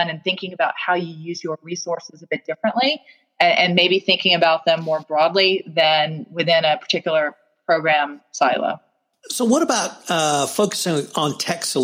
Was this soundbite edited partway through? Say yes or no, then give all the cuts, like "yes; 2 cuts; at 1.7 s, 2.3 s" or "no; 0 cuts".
no; 0 cuts